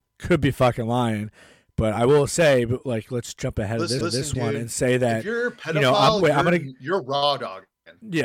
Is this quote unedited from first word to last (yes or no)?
no